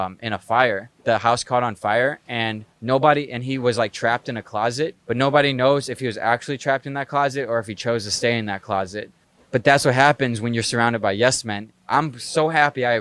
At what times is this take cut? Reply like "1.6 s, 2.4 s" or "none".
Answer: 1.0 s, 2.7 s, 5.0 s, 9.2 s